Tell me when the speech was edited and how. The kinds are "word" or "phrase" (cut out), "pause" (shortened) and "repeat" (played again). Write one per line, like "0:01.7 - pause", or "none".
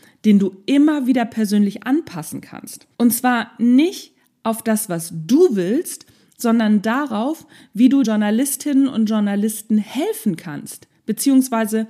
0:02.9 - pause
0:08.0 - word